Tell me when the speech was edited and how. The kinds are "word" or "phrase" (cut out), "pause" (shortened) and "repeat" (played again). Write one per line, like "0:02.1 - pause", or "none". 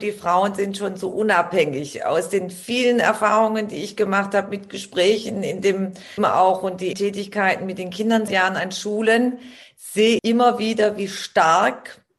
0:06.2 - word
0:06.9 - word
0:08.3 - word
0:10.2 - word